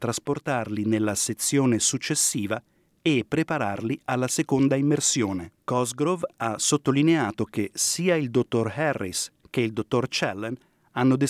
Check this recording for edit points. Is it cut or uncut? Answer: cut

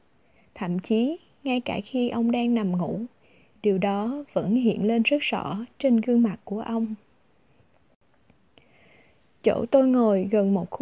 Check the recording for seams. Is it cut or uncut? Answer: uncut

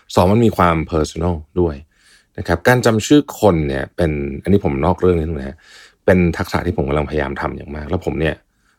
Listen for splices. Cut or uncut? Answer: uncut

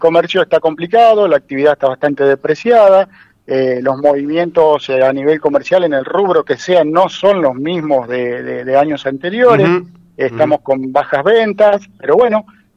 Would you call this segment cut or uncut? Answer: uncut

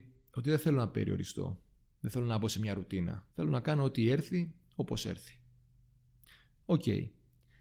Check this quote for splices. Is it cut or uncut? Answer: cut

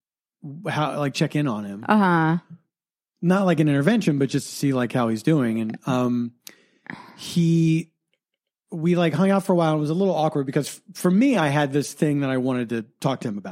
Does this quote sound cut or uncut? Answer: uncut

